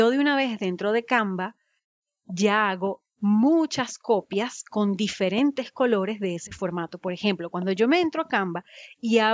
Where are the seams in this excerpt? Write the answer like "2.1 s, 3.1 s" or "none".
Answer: none